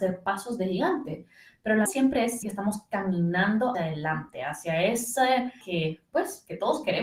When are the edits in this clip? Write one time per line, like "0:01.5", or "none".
0:01.9
0:02.4
0:03.7
0:05.6

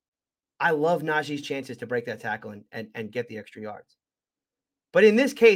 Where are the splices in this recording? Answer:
none

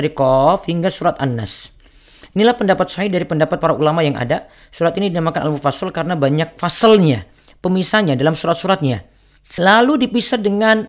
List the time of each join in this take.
none

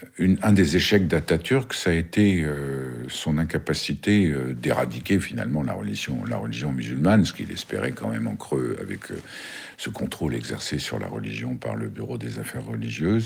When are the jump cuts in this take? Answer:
none

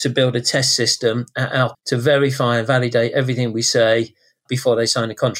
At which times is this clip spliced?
0:01.7

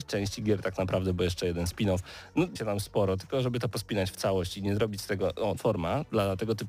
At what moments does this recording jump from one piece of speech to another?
0:02.6
0:05.6

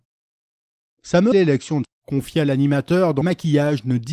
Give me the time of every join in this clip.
0:01.3
0:01.8
0:03.2

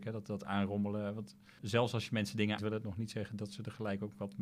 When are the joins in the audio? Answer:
0:01.6
0:02.6

